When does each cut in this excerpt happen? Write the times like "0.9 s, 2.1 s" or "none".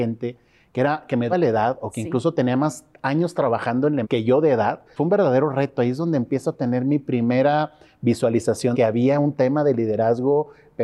1.3 s, 4.0 s, 5.0 s, 8.7 s